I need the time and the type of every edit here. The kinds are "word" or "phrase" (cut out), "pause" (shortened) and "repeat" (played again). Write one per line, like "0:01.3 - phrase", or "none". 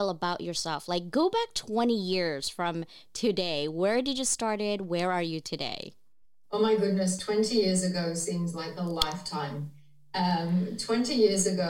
0:06.2 - pause